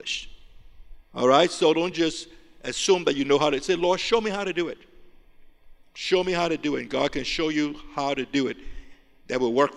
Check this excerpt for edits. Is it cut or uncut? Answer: uncut